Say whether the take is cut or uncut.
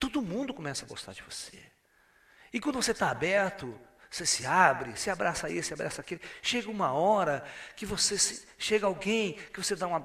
uncut